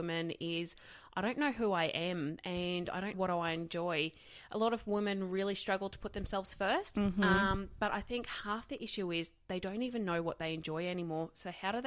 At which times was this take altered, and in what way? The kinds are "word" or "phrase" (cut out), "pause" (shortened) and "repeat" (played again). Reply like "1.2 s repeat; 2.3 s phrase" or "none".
3.1 s word